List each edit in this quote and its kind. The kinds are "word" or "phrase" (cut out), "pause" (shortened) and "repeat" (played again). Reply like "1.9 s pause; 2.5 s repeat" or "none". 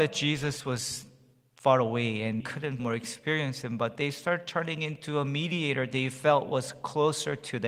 2.4 s word; 2.8 s phrase